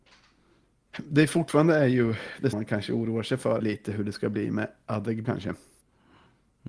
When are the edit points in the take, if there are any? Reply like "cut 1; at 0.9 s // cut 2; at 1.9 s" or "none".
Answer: cut 1; at 2.5 s // cut 2; at 3.6 s // cut 3; at 5.2 s